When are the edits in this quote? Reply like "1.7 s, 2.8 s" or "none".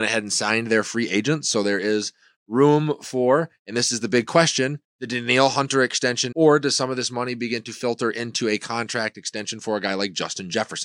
4.9 s, 6.3 s